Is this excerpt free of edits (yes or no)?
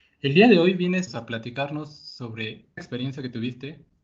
no